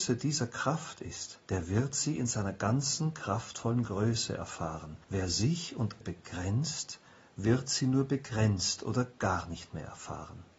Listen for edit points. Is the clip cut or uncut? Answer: cut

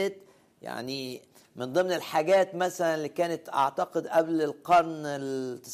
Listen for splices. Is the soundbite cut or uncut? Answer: uncut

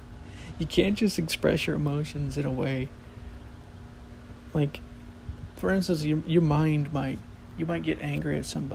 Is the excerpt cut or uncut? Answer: uncut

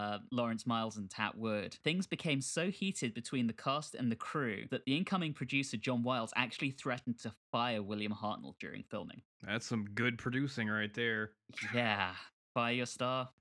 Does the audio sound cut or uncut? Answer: uncut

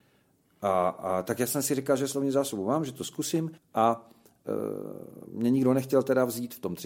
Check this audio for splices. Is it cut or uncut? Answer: cut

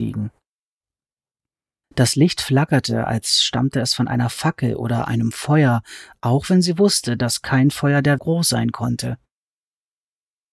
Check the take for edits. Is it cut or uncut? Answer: cut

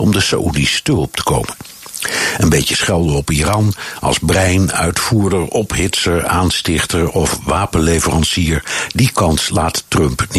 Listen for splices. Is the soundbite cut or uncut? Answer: uncut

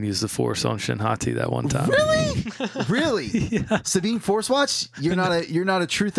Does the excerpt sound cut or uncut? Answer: uncut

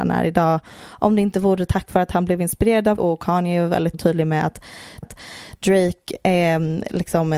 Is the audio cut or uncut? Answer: cut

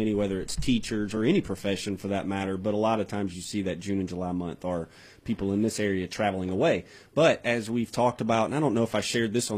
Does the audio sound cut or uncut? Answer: uncut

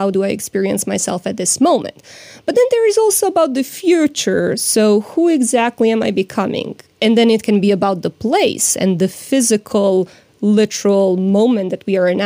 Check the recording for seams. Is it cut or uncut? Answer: uncut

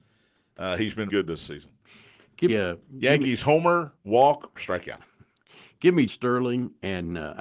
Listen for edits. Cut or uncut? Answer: cut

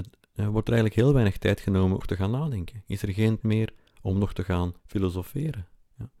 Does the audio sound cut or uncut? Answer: cut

